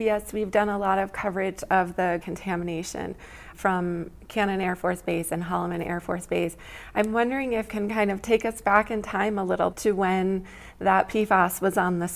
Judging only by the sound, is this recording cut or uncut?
cut